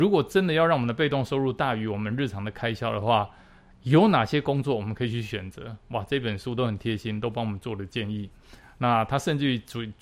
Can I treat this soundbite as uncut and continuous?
yes; 0 cuts

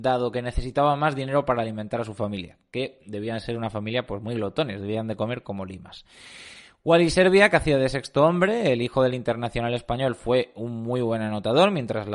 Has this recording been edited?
no; 0 cuts

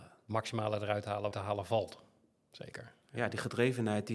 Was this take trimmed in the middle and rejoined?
yes; 2 cuts; at 1.3 s, 3.0 s

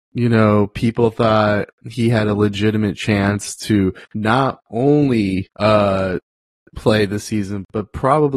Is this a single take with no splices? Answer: no; 2 cuts; at 4.0 s, 5.5 s

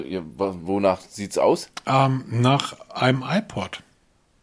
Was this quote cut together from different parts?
no; 0 cuts

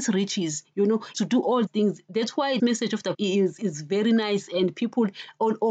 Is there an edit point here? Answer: yes; 5 cuts; at 1.1 s, 1.7 s, 2.6 s, 3.1 s, 3.6 s

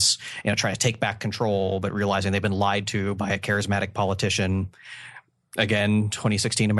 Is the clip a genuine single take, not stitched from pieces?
yes; 0 cuts

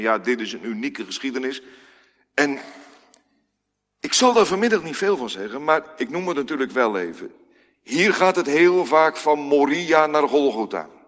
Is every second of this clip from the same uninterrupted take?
yes; 0 cuts

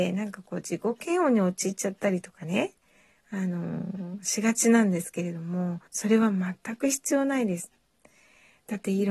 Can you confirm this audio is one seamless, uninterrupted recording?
no; 1 cut; at 5.9 s

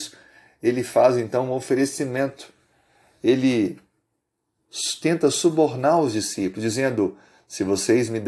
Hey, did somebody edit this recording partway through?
no; 0 cuts

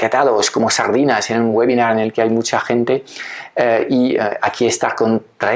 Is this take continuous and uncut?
yes; 0 cuts

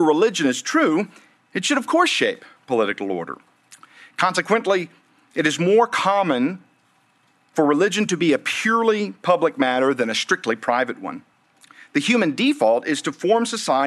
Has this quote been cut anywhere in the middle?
no; 0 cuts

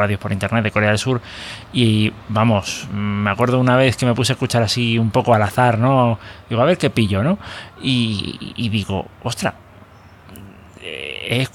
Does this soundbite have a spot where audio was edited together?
no; 0 cuts

